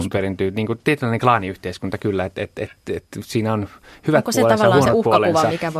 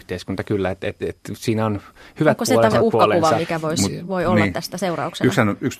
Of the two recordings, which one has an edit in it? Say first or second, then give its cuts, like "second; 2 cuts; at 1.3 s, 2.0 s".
second; 2 cuts; at 1.0 s, 2.7 s